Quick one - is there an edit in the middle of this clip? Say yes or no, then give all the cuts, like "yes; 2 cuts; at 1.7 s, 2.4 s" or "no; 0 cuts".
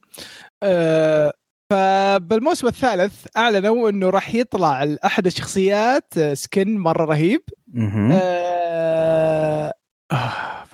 no; 0 cuts